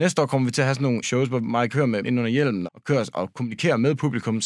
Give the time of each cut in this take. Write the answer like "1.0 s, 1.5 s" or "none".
1.0 s, 1.7 s, 2.0 s, 2.6 s